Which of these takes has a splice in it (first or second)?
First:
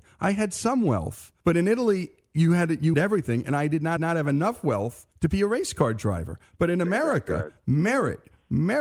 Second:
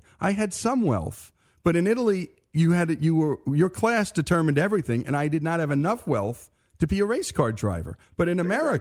first